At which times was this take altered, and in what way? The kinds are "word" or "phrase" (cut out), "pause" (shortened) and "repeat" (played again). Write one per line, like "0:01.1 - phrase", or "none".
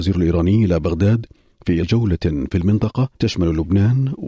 0:01.8 - word
0:03.1 - pause